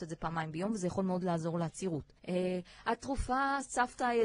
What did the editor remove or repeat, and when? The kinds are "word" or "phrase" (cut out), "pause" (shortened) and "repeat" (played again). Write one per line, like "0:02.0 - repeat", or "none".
0:02.2 - pause